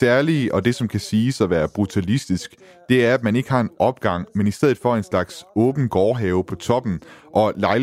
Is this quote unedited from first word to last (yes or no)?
yes